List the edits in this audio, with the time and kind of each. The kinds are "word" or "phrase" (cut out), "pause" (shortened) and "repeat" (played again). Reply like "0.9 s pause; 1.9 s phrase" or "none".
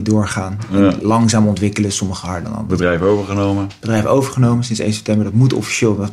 none